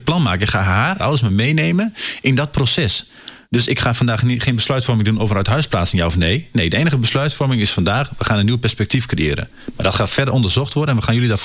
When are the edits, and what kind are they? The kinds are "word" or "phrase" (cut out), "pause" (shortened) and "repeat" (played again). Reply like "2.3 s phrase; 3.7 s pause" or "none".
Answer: 1.0 s phrase; 3.4 s pause